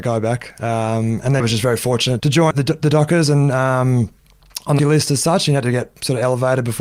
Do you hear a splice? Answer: yes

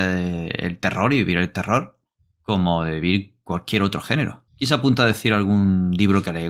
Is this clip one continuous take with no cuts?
no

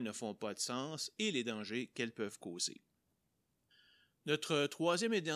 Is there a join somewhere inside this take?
no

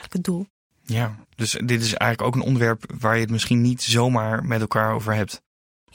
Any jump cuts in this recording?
yes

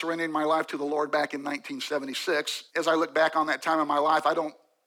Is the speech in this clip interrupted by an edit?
yes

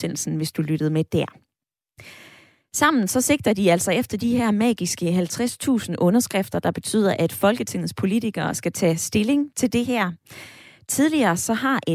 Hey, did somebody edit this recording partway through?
no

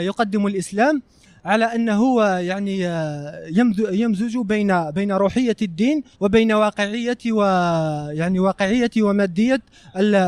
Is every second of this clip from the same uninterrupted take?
no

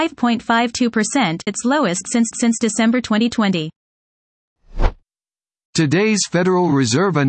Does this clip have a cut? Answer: yes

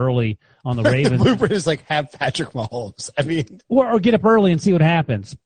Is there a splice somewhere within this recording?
yes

